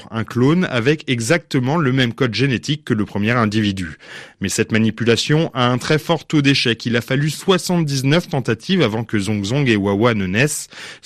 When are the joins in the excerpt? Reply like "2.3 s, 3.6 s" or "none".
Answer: none